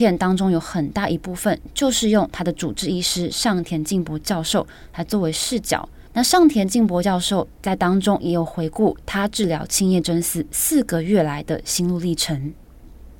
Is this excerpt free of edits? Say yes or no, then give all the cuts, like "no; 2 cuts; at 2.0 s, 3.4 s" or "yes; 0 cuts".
no; 1 cut; at 6.1 s